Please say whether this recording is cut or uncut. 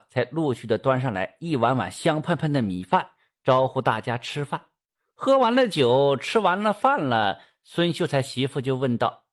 uncut